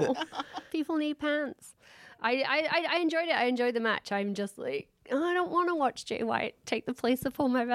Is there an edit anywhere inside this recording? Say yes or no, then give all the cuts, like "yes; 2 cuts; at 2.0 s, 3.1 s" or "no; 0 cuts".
no; 0 cuts